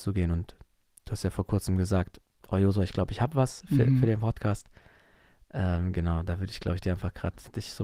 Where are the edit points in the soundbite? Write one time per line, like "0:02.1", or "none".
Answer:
none